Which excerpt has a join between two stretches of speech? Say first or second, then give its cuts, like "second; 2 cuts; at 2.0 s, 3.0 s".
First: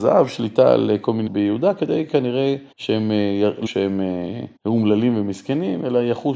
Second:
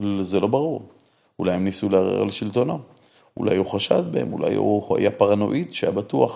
first; 4 cuts; at 1.3 s, 2.7 s, 3.7 s, 4.6 s